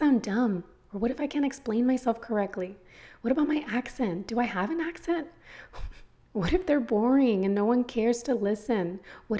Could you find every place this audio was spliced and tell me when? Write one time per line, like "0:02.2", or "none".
none